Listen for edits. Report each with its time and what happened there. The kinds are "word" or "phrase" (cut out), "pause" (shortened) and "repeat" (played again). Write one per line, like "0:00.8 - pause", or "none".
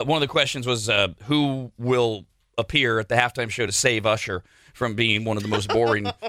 none